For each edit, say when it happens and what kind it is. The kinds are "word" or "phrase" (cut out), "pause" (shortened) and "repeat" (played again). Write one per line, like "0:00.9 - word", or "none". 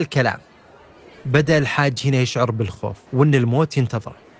0:03.1 - pause

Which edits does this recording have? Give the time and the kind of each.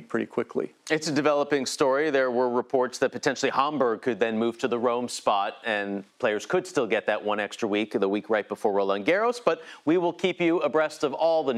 0:06.1 - pause

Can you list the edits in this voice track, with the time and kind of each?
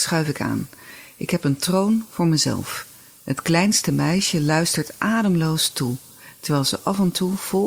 none

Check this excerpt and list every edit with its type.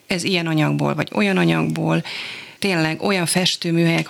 0:02.6 - pause

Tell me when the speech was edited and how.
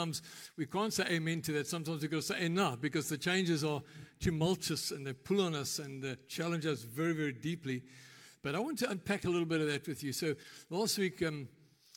none

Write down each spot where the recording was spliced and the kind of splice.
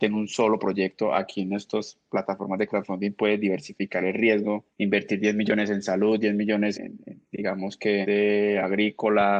0:04.7 - pause
0:06.7 - word
0:07.2 - pause
0:08.0 - phrase

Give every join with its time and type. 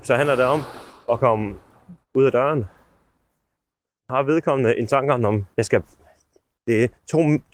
0:05.5 - pause

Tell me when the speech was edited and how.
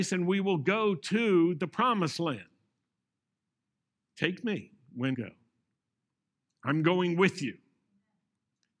0:03.0 - pause
0:05.1 - word

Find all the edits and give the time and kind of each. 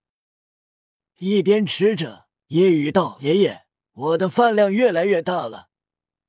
0:02.4 - pause
0:03.8 - pause

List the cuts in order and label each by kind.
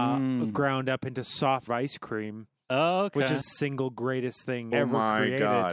0:01.7 - word
0:03.4 - phrase
0:04.7 - word

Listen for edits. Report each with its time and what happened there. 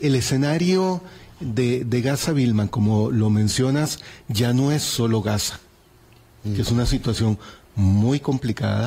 none

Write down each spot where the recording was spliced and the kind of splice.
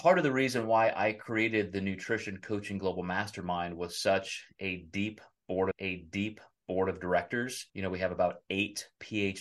0:05.7 - repeat
0:07.7 - pause

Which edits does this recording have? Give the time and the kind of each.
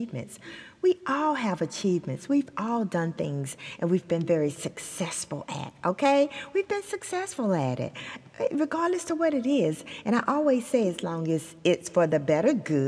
none

